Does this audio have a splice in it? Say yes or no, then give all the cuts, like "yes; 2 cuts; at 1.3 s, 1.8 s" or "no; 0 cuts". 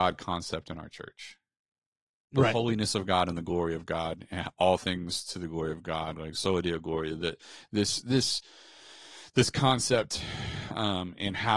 no; 0 cuts